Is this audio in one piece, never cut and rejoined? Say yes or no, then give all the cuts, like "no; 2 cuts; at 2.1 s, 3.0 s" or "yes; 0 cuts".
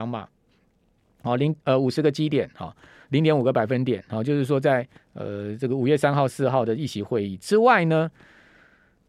no; 1 cut; at 5.0 s